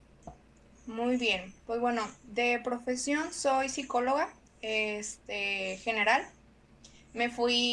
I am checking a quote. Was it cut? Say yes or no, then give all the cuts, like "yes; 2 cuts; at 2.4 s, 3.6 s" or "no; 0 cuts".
no; 0 cuts